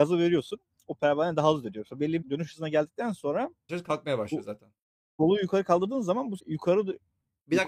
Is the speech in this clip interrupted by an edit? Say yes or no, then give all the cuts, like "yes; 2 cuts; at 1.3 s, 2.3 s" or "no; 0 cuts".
yes; 3 cuts; at 2.2 s, 3.7 s, 6.4 s